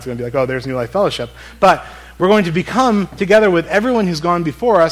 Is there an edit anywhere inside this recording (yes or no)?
no